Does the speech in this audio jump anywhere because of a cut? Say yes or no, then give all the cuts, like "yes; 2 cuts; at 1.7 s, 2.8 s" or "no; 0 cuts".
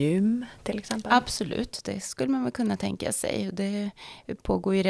no; 0 cuts